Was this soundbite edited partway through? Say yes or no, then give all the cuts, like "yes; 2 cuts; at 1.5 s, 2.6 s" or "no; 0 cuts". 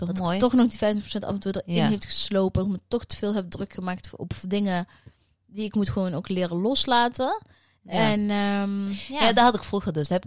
no; 0 cuts